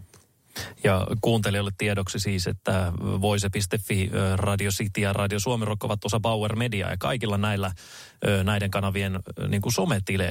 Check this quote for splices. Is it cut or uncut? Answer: uncut